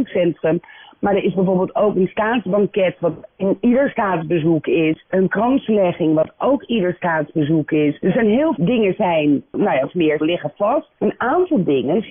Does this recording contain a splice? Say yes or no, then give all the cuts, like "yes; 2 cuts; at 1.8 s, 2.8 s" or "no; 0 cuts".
yes; 3 cuts; at 8.6 s, 9.8 s, 10.2 s